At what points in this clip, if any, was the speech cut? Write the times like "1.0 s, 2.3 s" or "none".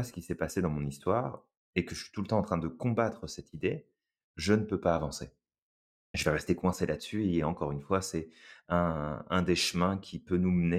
none